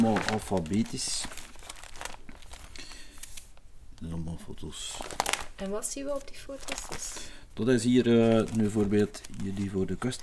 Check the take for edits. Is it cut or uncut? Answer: uncut